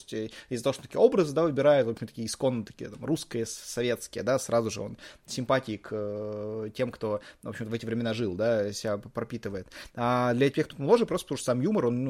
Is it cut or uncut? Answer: uncut